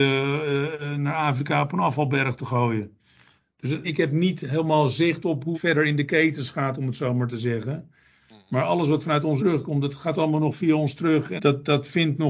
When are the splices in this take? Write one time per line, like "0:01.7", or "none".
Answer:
0:03.8
0:05.5
0:09.4
0:11.4